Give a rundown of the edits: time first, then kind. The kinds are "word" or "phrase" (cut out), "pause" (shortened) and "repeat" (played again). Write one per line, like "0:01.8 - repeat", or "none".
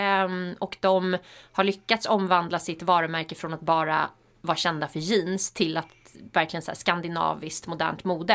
none